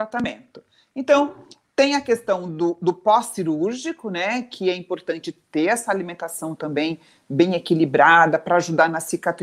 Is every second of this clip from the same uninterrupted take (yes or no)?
yes